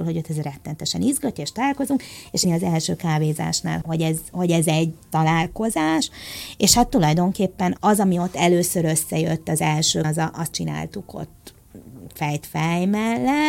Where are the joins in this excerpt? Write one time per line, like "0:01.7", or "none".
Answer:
0:02.4
0:03.8
0:04.3
0:07.8
0:10.0
0:10.5

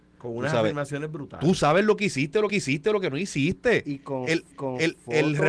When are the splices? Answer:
0:02.5
0:04.5

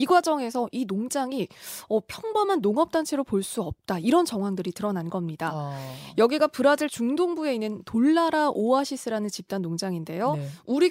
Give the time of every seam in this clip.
none

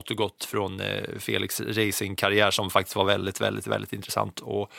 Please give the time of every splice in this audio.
none

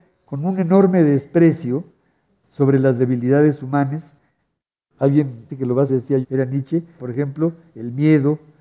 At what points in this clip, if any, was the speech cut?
0:05.5
0:05.9
0:06.2
0:07.0

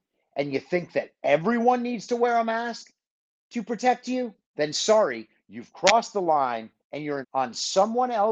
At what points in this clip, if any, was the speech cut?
0:04.4
0:06.8
0:07.2

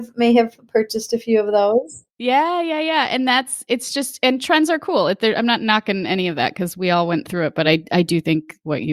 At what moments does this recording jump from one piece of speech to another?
none

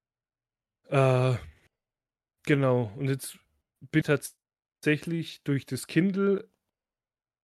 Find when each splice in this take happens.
0:04.0

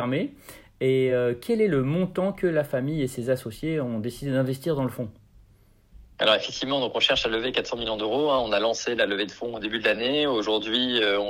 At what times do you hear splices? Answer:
none

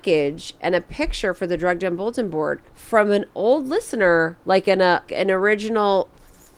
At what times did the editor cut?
0:02.7
0:04.4
0:05.1

